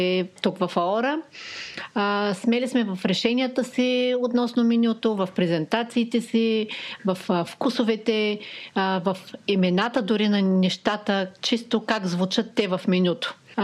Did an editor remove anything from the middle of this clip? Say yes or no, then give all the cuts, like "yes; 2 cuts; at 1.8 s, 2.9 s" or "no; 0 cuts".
yes; 1 cut; at 11.4 s